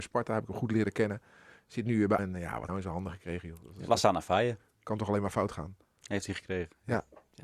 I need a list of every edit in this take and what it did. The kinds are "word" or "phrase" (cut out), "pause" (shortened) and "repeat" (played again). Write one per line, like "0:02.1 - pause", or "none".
0:02.2 - word
0:02.7 - phrase